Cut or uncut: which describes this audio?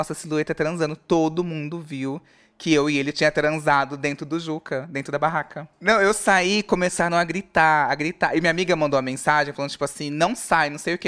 uncut